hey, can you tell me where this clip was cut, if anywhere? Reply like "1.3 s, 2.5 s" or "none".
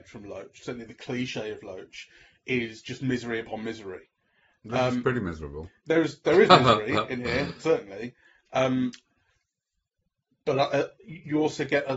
none